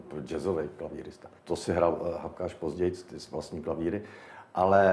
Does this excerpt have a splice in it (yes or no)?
yes